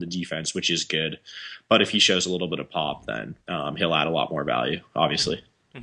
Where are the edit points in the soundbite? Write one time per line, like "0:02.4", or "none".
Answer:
0:03.4